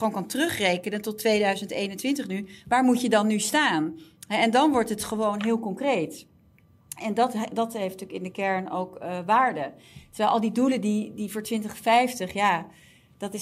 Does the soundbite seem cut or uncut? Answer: uncut